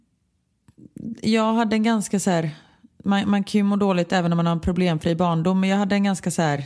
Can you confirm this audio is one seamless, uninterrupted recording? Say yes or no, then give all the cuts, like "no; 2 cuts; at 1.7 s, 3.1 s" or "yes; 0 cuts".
yes; 0 cuts